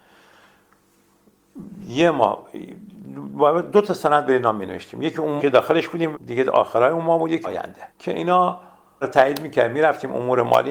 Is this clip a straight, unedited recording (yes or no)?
no